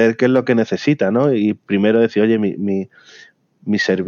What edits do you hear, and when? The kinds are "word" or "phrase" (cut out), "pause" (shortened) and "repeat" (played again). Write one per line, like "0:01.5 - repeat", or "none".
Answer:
none